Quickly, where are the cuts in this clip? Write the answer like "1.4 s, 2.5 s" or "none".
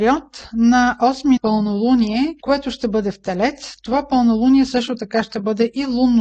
1.4 s